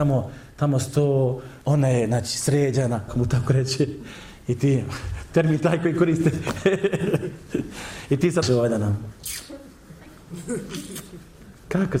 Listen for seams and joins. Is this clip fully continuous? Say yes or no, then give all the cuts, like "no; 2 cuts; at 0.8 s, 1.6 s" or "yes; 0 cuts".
no; 3 cuts; at 1.6 s, 3.1 s, 8.4 s